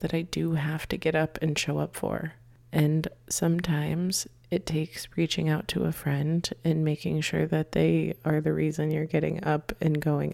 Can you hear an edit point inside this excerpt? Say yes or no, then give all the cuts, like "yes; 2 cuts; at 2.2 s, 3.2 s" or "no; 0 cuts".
no; 0 cuts